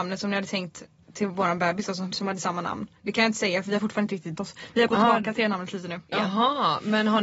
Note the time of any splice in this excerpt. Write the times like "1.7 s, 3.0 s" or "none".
1.0 s, 2.1 s, 3.0 s, 4.4 s, 4.9 s